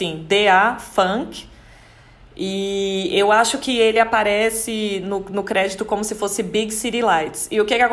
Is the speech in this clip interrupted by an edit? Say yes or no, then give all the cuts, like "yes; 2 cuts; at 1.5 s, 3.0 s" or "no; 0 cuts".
no; 0 cuts